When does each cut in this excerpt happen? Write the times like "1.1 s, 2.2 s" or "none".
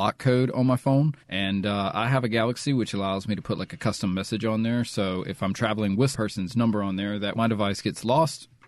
1.2 s, 6.1 s, 7.3 s